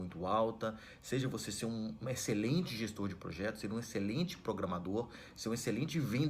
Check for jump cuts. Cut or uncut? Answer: uncut